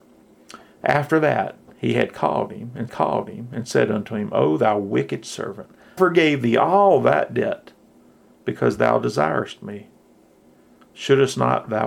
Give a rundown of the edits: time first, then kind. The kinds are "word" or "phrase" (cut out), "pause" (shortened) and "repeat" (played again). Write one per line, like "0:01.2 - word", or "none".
0:02.9 - repeat
0:06.0 - word

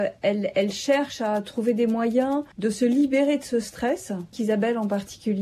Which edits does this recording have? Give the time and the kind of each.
0:02.5 - pause
0:04.3 - word

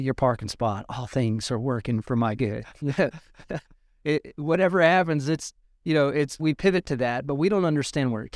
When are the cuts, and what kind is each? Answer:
0:06.4 - word

